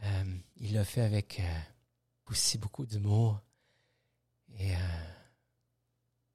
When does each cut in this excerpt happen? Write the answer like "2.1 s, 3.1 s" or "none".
2.3 s